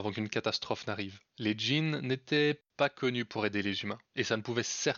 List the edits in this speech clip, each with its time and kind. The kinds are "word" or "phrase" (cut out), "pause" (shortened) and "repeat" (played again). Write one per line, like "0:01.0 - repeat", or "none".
0:01.3 - pause
0:04.1 - pause